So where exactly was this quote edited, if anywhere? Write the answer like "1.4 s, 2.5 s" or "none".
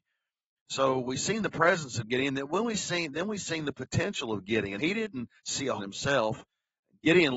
4.8 s, 5.4 s, 5.8 s